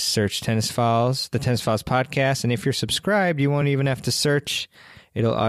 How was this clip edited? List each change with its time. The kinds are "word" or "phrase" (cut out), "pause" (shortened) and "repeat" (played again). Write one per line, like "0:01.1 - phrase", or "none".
none